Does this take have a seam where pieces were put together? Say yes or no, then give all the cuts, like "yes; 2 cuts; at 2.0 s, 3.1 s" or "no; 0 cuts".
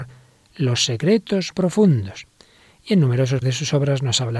yes; 2 cuts; at 1.5 s, 3.4 s